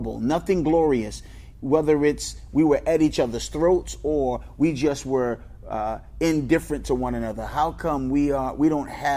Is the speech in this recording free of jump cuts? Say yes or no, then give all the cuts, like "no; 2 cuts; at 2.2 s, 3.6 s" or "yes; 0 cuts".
yes; 0 cuts